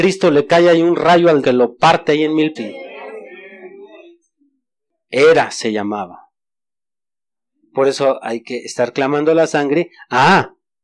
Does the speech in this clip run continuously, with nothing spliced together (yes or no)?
no